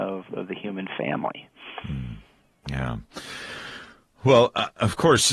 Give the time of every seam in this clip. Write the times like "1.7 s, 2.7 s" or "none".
none